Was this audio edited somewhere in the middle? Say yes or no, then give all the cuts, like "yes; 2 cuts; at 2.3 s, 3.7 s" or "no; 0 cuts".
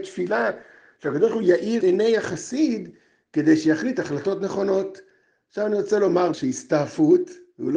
yes; 2 cuts; at 1.8 s, 6.3 s